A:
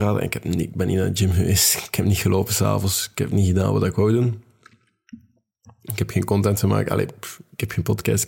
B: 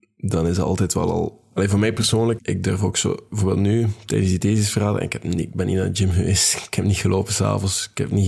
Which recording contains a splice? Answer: B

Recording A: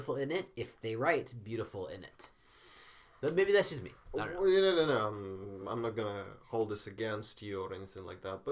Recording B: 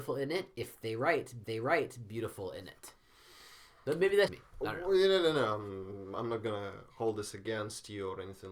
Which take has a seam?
B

